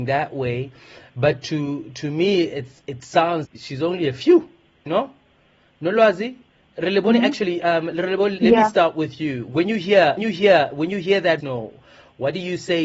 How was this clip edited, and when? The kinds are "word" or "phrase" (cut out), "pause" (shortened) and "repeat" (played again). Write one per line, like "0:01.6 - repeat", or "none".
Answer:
0:03.4 - word
0:04.9 - word
0:08.4 - word
0:10.2 - repeat
0:11.4 - word

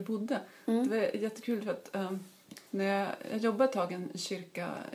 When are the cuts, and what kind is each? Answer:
0:02.7 - pause

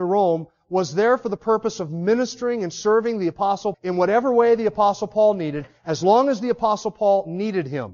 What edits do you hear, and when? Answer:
0:03.7 - word

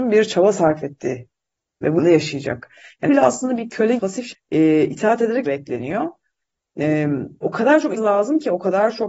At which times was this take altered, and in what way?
0:02.0 - word
0:03.1 - word
0:04.0 - word
0:04.3 - word
0:05.4 - word
0:07.4 - word
0:08.0 - word

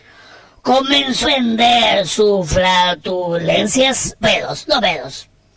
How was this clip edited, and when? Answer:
0:01.2 - word
0:04.2 - word

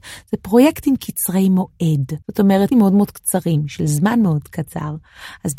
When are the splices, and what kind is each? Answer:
0:02.2 - pause
0:02.7 - word

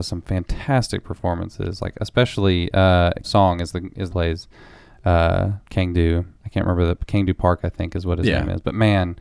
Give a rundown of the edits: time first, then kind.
0:03.2 - phrase
0:04.1 - phrase
0:05.7 - pause
0:06.4 - pause

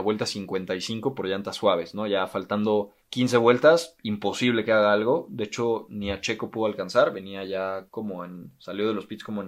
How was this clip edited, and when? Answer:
0:03.0 - pause
0:07.9 - pause

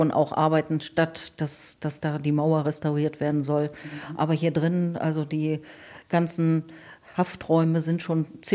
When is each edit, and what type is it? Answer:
none

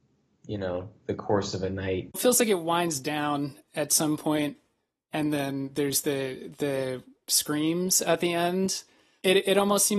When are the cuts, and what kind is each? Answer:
0:02.1 - word

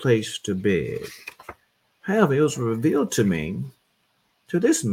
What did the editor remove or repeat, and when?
none

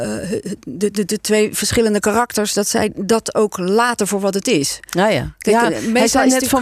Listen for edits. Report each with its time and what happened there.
none

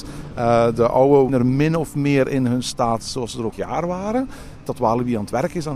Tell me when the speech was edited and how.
0:01.3 - phrase
0:03.5 - word
0:04.7 - word

